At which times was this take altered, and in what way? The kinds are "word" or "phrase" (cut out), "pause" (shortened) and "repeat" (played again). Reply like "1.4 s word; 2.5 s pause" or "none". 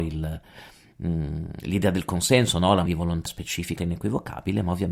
2.9 s word; 3.3 s word; 3.8 s word